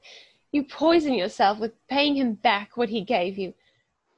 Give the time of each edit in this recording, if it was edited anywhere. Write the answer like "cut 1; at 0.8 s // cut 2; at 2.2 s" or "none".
none